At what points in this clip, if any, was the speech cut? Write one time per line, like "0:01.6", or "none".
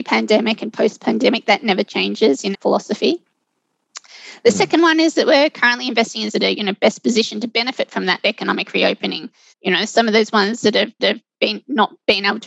0:02.5
0:06.3
0:09.5
0:11.0